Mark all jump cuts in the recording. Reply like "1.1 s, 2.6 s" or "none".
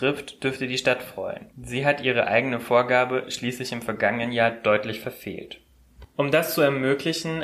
1.5 s